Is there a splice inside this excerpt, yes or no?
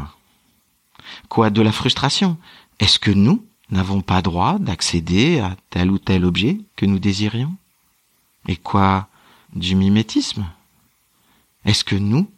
yes